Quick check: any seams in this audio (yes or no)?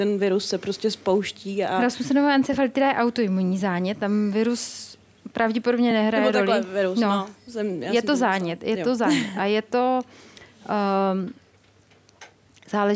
no